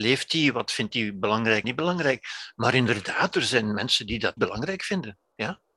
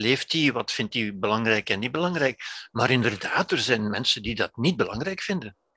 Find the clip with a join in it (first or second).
first